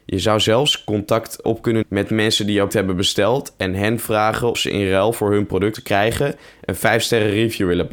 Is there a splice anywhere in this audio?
yes; 5 cuts; at 1.4 s, 1.8 s, 2.7 s, 4.5 s, 5.7 s

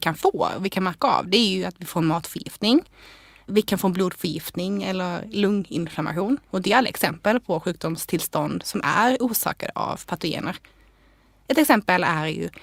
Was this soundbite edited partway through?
no; 0 cuts

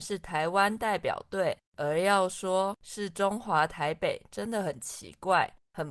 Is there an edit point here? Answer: yes; 1 cut; at 1.7 s

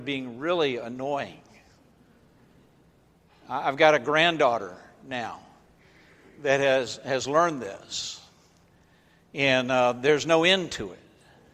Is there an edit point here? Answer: no; 0 cuts

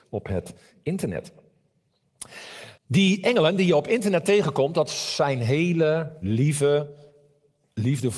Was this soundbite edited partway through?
yes; 1 cut; at 2.8 s

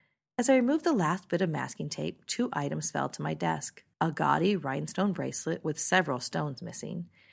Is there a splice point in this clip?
yes; 1 cut; at 3.9 s

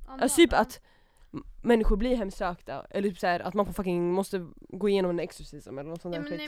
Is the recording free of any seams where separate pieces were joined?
yes; 0 cuts

